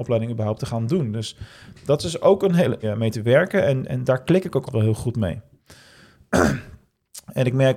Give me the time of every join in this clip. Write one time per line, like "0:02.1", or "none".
0:02.8
0:04.7

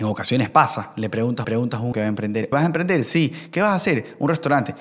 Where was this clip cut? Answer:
0:01.4
0:01.9
0:02.5

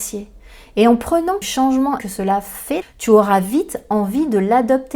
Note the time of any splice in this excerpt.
0:01.4
0:02.0
0:02.8

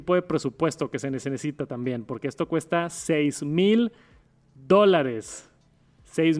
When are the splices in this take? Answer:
none

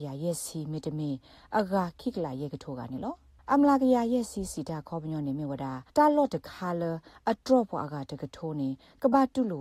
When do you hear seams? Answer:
0:03.4
0:05.9

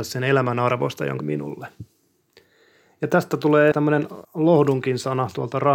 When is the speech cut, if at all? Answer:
0:01.2
0:03.7
0:04.2

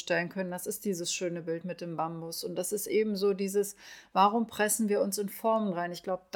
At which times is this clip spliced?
none

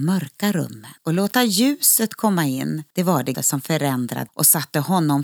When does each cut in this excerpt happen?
0:01.0
0:02.9
0:03.3
0:04.3

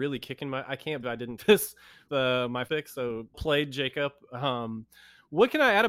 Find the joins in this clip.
0:01.0
0:01.4
0:02.1
0:02.7
0:03.3

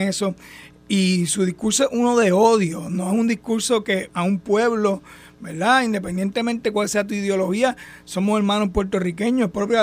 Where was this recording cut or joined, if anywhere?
0:04.1

